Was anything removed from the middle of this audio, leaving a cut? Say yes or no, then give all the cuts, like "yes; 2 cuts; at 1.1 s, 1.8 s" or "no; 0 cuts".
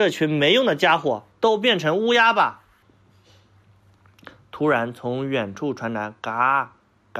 yes; 2 cuts; at 1.3 s, 2.8 s